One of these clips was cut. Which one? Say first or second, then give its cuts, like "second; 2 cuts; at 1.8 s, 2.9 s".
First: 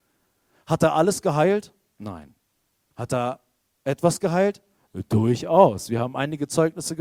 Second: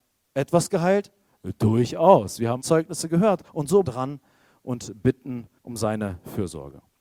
second; 4 cuts; at 2.6 s, 3.5 s, 3.9 s, 5.6 s